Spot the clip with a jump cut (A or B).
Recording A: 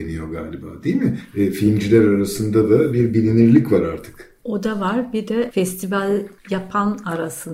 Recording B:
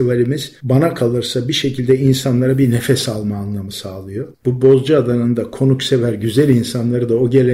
B